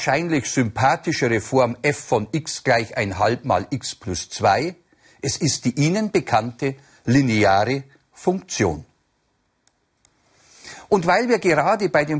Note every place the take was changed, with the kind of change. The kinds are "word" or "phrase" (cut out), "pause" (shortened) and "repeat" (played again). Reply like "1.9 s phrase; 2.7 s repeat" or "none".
none